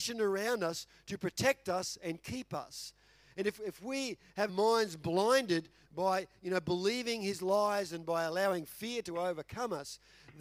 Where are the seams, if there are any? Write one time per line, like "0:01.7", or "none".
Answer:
0:04.5